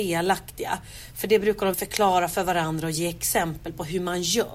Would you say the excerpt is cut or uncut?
cut